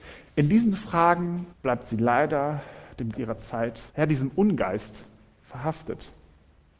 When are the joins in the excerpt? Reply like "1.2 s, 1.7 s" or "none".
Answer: 1.5 s, 3.1 s, 3.9 s